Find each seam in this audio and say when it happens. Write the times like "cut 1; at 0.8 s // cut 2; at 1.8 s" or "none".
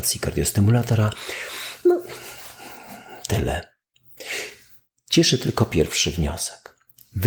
none